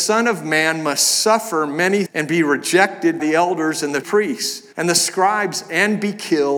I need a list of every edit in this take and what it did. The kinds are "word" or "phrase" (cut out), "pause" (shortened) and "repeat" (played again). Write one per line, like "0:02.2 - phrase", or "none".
0:02.1 - word
0:03.2 - word
0:04.0 - word
0:04.7 - pause